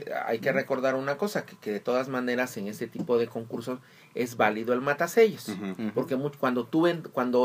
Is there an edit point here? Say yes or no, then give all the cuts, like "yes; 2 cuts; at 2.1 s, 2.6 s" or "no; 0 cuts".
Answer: no; 0 cuts